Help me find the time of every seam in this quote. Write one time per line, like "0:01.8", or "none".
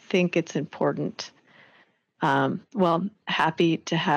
0:03.2